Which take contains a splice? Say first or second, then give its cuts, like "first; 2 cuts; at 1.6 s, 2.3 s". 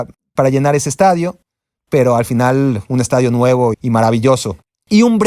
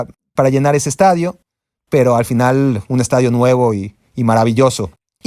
first; 1 cut; at 3.7 s